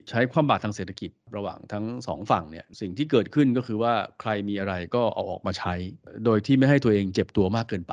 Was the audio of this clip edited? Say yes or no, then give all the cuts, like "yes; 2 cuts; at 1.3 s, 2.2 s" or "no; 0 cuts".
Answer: no; 0 cuts